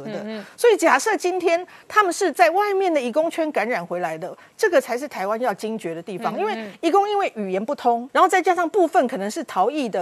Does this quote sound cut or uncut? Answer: cut